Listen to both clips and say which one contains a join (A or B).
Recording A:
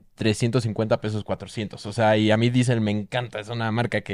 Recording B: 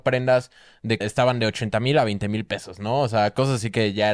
B